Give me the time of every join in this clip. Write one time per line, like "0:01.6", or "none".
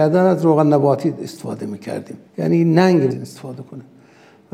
0:02.3
0:03.1